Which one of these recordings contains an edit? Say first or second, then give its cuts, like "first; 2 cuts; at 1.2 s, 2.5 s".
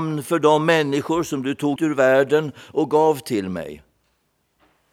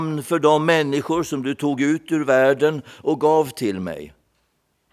first; 1 cut; at 1.8 s